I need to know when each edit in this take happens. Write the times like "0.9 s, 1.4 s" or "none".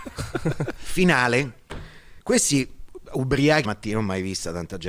2.2 s, 3.6 s